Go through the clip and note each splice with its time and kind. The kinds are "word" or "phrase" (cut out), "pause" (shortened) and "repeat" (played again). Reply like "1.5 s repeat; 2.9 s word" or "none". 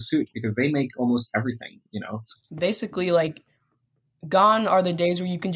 none